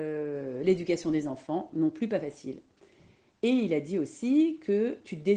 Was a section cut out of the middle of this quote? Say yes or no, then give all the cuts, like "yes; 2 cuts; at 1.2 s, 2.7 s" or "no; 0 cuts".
no; 0 cuts